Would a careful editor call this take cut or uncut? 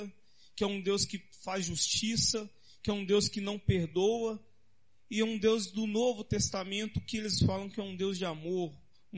uncut